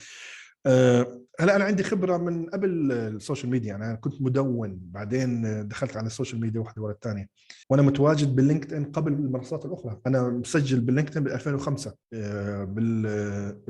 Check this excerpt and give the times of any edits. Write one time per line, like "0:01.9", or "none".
0:01.3
0:07.6
0:12.0